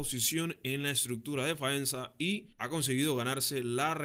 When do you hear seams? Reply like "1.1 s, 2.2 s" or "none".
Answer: 2.5 s

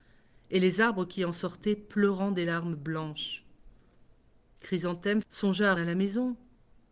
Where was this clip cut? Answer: 5.2 s, 5.8 s

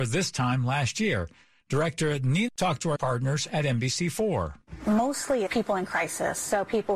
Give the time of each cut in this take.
2.5 s, 3.0 s, 5.5 s

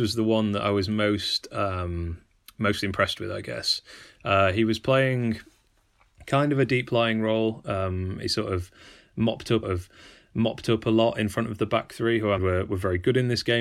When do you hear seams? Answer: 9.6 s, 12.4 s

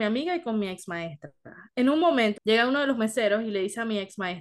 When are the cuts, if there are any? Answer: 2.4 s

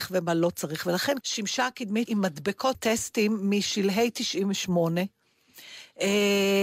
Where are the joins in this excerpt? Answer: 1.2 s, 2.1 s, 2.7 s

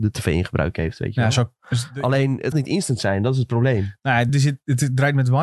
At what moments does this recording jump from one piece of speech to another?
2.5 s, 4.3 s

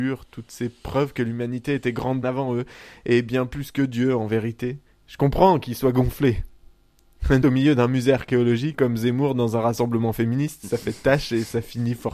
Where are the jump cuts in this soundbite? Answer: 2.2 s, 7.4 s, 8.7 s

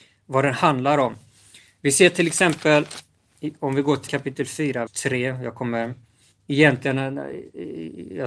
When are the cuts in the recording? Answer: 4.1 s, 4.9 s, 6.3 s

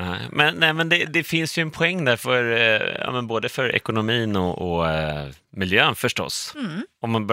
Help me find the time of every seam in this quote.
none

